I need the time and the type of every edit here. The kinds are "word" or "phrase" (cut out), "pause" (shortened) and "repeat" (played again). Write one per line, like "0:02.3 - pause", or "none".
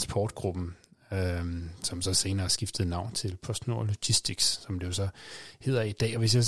none